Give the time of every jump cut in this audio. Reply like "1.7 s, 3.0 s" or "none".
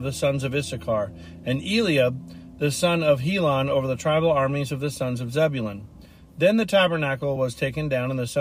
none